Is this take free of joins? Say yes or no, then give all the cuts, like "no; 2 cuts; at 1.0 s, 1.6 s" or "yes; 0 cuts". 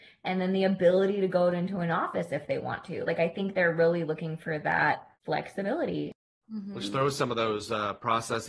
no; 1 cut; at 5.1 s